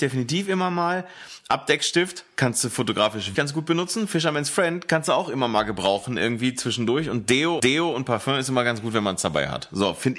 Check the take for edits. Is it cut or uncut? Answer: cut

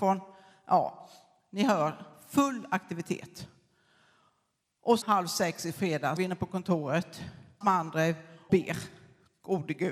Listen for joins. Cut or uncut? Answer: cut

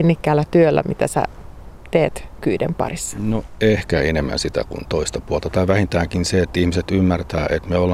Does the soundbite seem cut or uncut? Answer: uncut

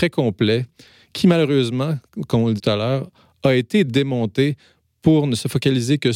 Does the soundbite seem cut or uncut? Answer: cut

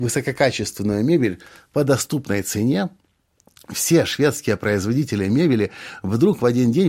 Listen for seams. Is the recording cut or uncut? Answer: uncut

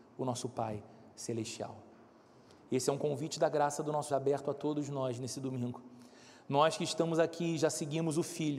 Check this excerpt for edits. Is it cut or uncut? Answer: cut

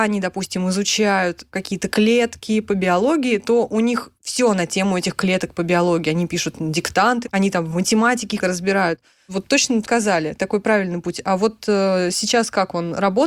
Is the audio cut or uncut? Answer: cut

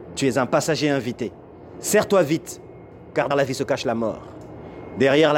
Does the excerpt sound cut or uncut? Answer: cut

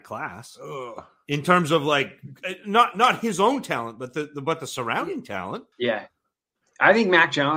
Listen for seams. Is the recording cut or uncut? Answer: cut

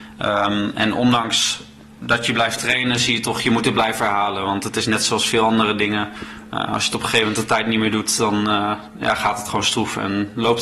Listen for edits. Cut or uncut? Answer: uncut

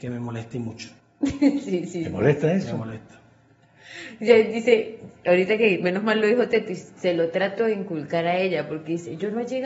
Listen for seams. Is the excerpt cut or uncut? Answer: cut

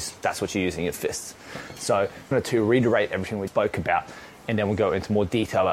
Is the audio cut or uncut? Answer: cut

